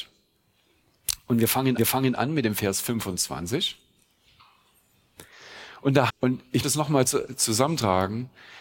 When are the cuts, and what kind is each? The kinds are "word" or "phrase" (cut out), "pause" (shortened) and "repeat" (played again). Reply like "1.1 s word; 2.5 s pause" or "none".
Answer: 1.8 s repeat; 6.1 s phrase; 6.6 s word